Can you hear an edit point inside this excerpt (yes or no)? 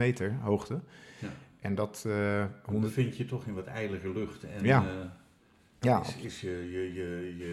no